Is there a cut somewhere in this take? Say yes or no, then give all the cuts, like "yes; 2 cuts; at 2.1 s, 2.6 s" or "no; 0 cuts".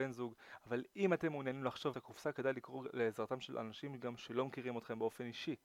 yes; 1 cut; at 1.9 s